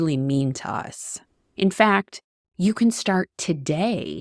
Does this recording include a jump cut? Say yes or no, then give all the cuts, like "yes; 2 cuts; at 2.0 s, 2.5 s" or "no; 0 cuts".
no; 0 cuts